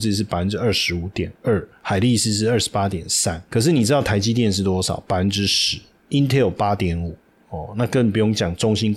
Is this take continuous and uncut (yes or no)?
yes